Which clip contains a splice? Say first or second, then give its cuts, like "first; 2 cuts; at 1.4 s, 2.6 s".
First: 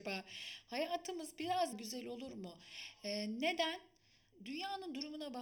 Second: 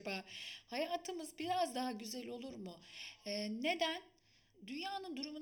first; 1 cut; at 1.7 s